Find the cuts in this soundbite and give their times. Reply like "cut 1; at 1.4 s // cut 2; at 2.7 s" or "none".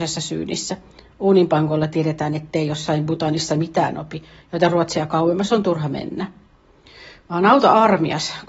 none